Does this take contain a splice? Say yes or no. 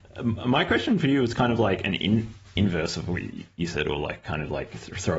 no